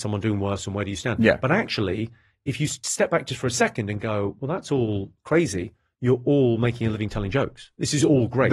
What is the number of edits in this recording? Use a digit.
0